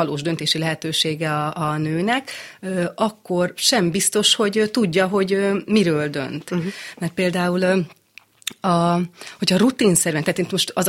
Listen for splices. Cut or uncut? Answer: uncut